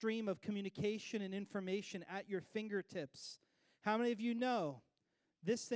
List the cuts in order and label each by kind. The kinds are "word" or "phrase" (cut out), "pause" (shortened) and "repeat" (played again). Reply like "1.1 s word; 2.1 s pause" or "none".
none

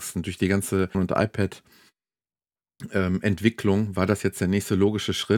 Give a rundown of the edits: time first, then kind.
0.9 s word

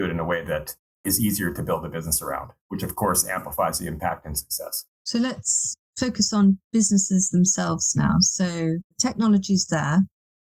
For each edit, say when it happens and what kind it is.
4.9 s pause; 8.9 s pause

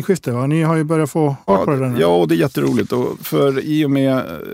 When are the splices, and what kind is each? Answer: 1.5 s word; 3.2 s word

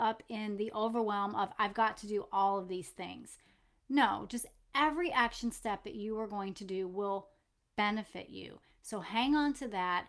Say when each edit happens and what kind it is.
none

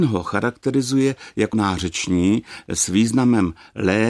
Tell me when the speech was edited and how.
1.5 s word

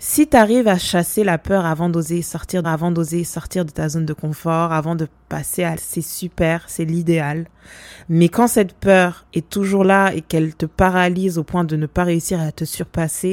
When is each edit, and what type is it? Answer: 2.6 s repeat; 5.8 s word; 9.3 s pause

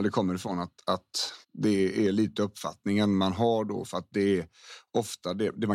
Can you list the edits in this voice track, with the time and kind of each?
1.4 s pause

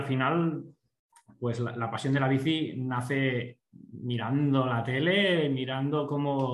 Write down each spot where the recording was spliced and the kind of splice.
none

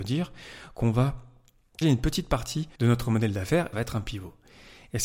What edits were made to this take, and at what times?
1.8 s word; 2.8 s pause; 3.7 s phrase

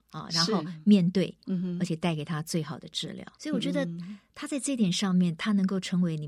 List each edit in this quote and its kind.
1.4 s phrase; 3.3 s pause

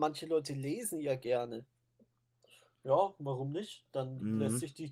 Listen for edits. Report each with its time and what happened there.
none

